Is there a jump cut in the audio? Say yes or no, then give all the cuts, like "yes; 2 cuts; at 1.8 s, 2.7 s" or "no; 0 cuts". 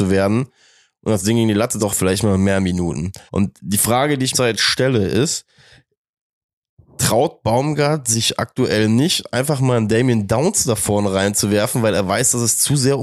yes; 3 cuts; at 1.8 s, 3.3 s, 4.3 s